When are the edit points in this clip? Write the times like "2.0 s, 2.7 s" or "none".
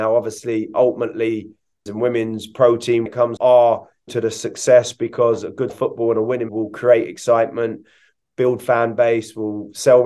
1.9 s, 3.1 s, 3.4 s, 4.1 s, 5.7 s, 6.5 s, 8.2 s